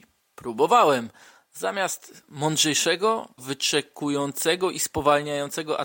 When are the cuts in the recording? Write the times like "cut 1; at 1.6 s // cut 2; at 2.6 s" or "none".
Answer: cut 1; at 3.4 s